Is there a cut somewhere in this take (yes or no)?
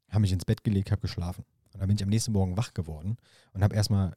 no